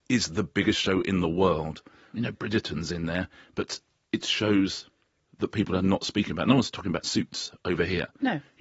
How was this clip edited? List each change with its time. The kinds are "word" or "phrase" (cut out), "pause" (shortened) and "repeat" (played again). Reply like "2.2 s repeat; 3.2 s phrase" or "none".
none